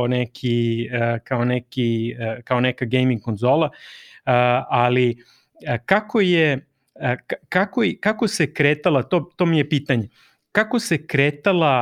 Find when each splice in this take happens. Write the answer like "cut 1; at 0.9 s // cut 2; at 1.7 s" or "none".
none